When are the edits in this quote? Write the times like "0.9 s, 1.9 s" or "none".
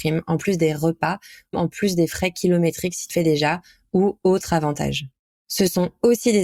1.5 s, 3.1 s